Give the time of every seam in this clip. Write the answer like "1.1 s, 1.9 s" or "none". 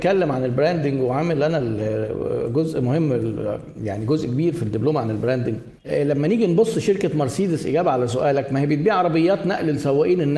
5.8 s